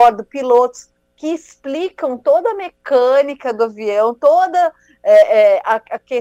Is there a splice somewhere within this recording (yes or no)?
no